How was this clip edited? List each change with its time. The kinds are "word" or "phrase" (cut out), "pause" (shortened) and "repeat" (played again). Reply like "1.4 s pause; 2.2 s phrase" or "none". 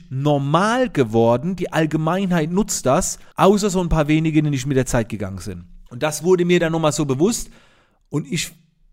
3.3 s pause; 5.9 s pause